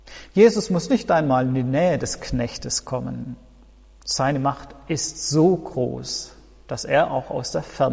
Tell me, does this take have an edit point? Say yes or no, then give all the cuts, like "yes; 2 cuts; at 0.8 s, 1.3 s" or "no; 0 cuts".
no; 0 cuts